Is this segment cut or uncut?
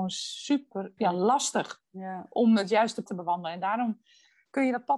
cut